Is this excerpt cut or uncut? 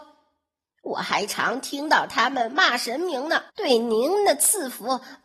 cut